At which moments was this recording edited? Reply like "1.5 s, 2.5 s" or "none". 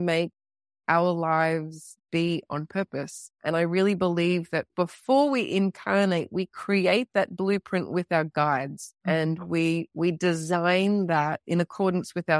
2.0 s, 3.3 s, 4.7 s, 9.0 s